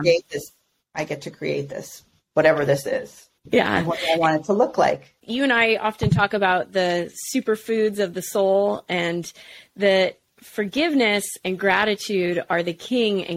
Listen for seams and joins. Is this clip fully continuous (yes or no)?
yes